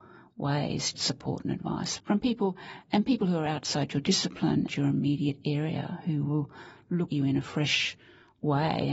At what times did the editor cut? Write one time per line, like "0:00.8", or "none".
0:00.9
0:02.0
0:04.7
0:07.1